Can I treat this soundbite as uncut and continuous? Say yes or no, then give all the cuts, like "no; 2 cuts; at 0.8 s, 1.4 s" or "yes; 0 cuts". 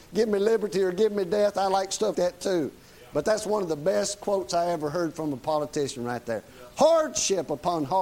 no; 1 cut; at 2.1 s